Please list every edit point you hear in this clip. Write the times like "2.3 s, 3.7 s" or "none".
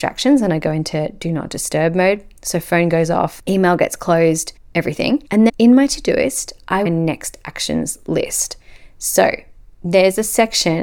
5.5 s, 6.9 s